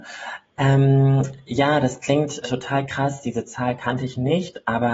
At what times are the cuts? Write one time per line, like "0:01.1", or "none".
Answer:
0:02.4